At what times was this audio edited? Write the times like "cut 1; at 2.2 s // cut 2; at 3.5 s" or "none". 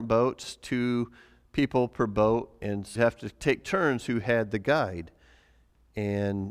cut 1; at 3.0 s